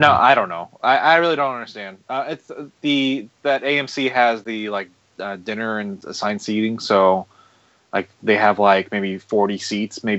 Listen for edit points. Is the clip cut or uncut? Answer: uncut